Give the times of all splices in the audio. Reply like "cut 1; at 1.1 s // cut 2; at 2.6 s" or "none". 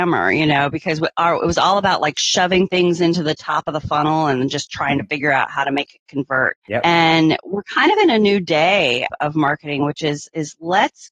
cut 1; at 6.6 s